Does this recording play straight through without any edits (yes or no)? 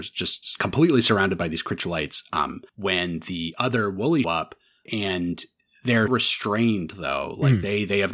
no